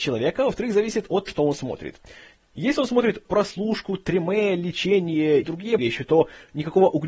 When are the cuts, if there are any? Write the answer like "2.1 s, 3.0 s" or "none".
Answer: 1.3 s, 3.3 s, 5.4 s, 5.8 s